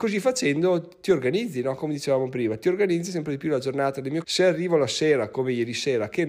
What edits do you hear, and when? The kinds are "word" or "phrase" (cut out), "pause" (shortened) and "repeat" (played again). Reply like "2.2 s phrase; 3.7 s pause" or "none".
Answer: 4.2 s phrase